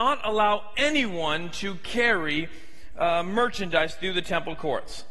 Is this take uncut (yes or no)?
yes